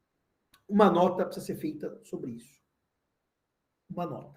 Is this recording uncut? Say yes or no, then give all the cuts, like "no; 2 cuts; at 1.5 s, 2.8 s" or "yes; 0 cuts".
yes; 0 cuts